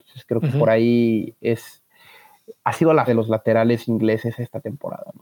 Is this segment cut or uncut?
cut